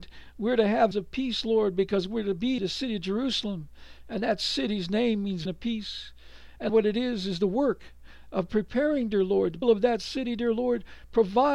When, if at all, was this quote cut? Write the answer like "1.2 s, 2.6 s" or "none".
0.9 s, 2.6 s, 5.5 s, 6.7 s, 9.6 s

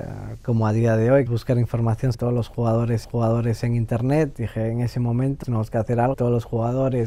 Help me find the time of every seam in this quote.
1.3 s, 2.1 s, 3.0 s, 4.3 s, 5.4 s, 6.1 s

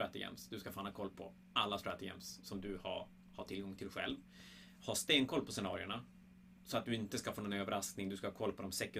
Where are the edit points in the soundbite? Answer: 6.6 s

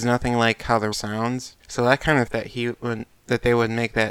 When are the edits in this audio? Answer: 0.9 s, 1.6 s, 2.3 s

